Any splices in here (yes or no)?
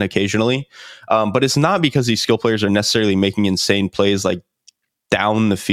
no